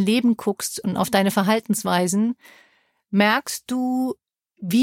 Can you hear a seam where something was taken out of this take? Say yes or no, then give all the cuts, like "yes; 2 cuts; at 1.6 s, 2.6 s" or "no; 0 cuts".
no; 0 cuts